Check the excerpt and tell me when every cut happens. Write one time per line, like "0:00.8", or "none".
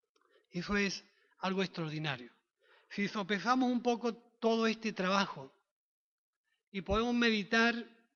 none

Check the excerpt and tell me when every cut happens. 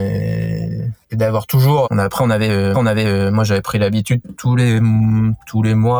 0:01.0
0:01.8
0:02.7

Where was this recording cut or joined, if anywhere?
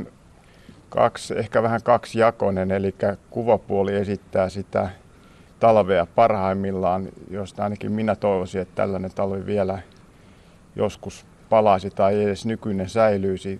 none

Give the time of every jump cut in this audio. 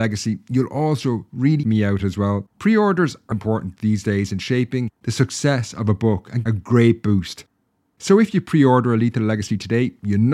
0:01.6
0:02.5
0:03.3
0:05.0
0:06.5

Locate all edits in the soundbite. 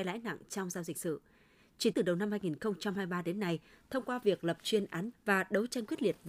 0:00.9
0:01.9
0:05.1

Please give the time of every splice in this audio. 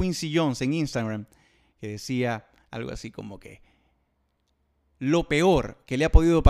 none

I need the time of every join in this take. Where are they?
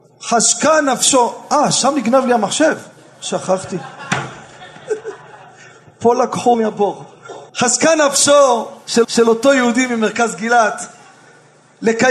0:06.5
0:07.5
0:09.0

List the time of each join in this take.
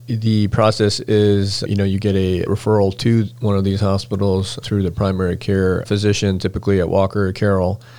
0:01.7
0:02.5
0:04.6
0:05.8

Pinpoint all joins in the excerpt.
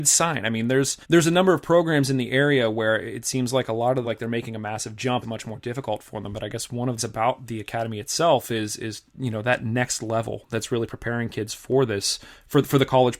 0:01.0
0:04.0
0:05.2
0:07.0

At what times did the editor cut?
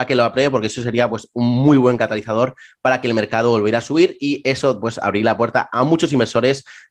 none

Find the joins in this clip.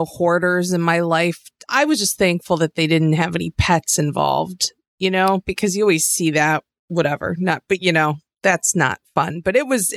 none

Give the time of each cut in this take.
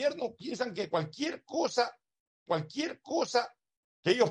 0:02.5

